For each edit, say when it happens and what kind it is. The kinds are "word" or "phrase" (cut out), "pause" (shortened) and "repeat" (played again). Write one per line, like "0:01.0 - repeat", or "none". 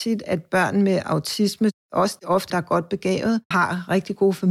0:02.5 - word
0:03.5 - word